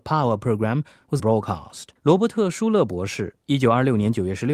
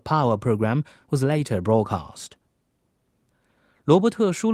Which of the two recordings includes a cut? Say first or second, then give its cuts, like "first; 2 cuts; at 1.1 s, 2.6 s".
first; 3 cuts; at 1.2 s, 2.0 s, 3.4 s